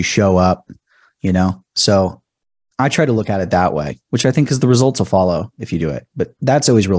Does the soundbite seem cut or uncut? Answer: uncut